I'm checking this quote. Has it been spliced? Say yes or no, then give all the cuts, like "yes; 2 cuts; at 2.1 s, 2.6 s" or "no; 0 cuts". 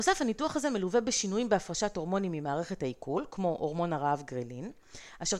no; 0 cuts